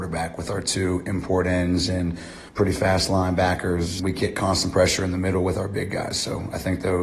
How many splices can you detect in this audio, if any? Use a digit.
2